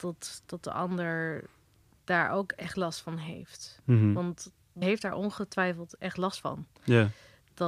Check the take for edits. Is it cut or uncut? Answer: cut